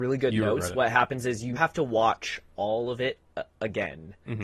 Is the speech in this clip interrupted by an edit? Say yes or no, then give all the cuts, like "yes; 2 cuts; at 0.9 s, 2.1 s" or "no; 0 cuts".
yes; 1 cut; at 1.6 s